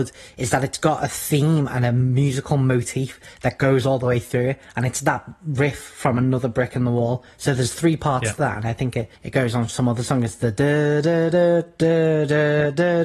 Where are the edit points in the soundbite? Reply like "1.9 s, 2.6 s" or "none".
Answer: 9.2 s